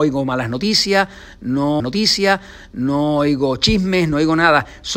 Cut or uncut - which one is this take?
cut